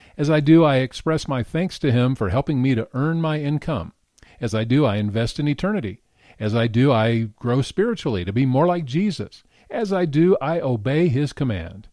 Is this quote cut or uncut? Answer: uncut